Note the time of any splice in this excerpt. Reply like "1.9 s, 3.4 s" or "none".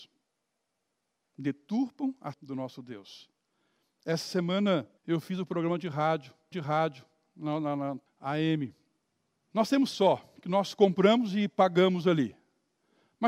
2.3 s, 5.0 s, 6.5 s, 8.1 s, 9.1 s, 9.9 s